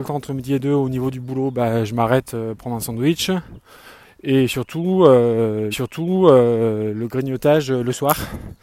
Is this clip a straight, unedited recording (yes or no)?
no